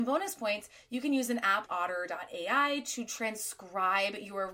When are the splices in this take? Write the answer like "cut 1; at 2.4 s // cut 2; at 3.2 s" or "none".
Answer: cut 1; at 1.7 s